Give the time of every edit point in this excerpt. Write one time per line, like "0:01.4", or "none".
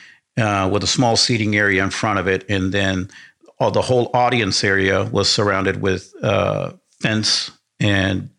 none